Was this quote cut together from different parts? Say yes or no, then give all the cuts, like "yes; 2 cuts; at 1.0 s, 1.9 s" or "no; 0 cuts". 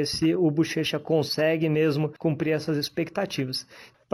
yes; 1 cut; at 2.2 s